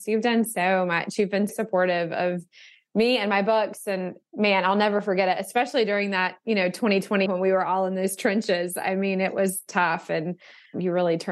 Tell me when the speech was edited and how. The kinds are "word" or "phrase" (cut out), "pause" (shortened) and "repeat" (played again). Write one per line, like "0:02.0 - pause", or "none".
0:01.5 - word
0:07.3 - word